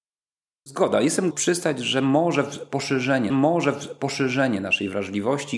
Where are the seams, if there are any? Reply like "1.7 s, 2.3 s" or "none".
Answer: 1.3 s, 3.3 s